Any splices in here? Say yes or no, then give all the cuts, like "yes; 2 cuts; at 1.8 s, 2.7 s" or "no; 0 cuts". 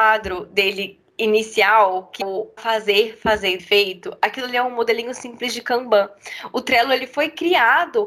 yes; 3 cuts; at 2.2 s, 2.6 s, 3.6 s